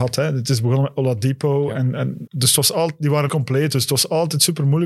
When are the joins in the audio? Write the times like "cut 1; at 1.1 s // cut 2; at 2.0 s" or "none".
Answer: cut 1; at 2.3 s // cut 2; at 3.3 s